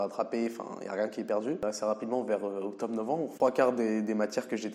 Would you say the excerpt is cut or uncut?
uncut